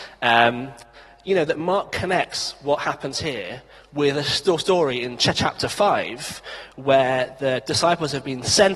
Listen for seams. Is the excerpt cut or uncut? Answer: uncut